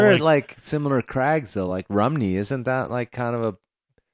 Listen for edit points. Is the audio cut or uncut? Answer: uncut